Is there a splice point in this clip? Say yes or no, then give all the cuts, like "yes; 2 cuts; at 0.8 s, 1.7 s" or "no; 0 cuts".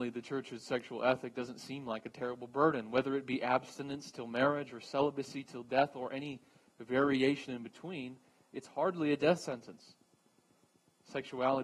no; 0 cuts